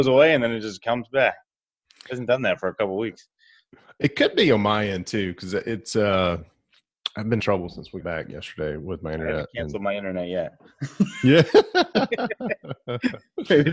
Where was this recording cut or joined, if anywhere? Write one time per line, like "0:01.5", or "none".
0:07.4
0:08.0

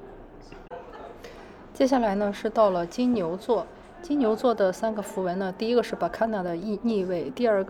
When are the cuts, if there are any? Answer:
none

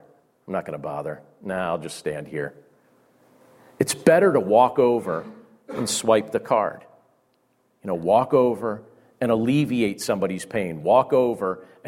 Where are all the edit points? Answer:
none

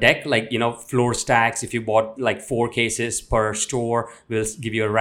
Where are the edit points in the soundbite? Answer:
none

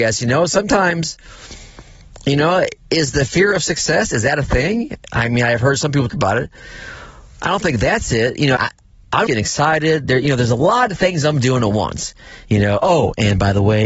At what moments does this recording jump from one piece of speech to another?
0:06.1
0:08.6
0:09.3

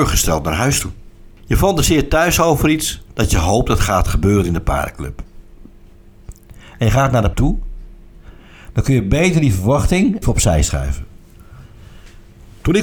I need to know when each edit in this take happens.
0:01.4
0:03.1
0:07.3
0:10.2

